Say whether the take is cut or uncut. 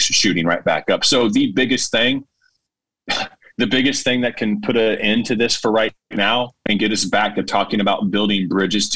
uncut